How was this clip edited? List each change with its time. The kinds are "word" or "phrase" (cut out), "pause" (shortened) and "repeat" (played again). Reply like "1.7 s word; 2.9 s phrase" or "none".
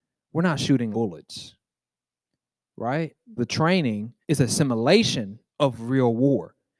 0.9 s word; 3.4 s word; 4.2 s pause; 5.5 s pause